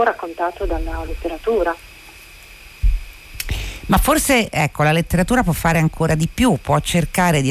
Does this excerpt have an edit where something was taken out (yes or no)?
yes